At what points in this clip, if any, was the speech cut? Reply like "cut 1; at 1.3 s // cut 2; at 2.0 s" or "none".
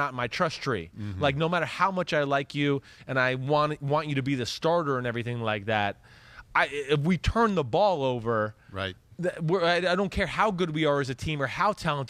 none